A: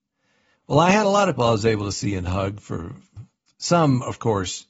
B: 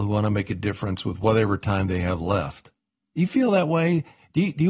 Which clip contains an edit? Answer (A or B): A